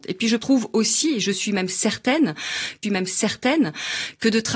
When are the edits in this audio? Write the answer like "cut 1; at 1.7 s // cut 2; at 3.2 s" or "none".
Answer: cut 1; at 2.8 s